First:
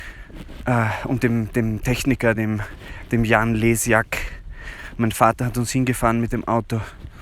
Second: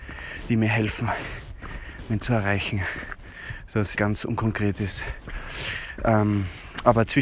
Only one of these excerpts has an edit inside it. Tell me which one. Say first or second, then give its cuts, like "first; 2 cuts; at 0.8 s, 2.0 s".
second; 2 cuts; at 2.2 s, 3.9 s